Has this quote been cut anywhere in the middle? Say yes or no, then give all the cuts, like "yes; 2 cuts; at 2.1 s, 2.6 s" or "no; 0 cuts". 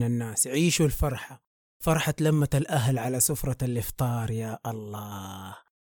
no; 0 cuts